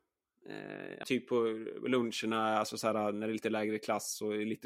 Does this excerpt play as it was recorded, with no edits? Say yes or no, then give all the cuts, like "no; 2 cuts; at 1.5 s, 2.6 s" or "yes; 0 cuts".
no; 1 cut; at 1.0 s